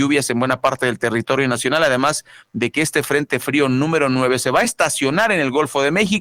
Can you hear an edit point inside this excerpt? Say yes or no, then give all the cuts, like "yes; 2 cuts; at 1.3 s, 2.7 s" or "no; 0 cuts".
no; 0 cuts